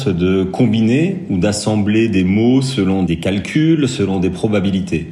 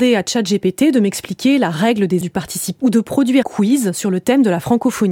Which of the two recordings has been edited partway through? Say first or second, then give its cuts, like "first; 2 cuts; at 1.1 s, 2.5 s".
second; 3 cuts; at 2.2 s, 2.8 s, 3.4 s